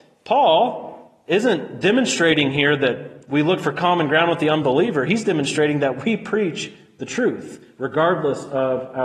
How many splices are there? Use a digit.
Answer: 0